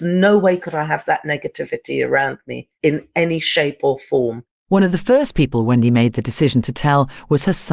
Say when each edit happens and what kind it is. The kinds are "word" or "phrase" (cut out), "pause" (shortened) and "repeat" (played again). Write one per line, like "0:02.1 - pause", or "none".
0:02.7 - pause
0:04.5 - pause

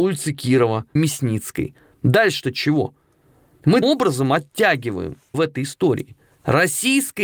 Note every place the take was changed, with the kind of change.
0:01.0 - word
0:03.8 - word
0:05.3 - word

